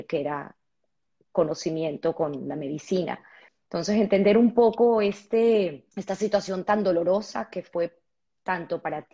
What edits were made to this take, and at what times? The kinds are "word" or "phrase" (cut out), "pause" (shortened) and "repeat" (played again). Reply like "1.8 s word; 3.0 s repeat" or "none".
3.5 s pause; 5.9 s pause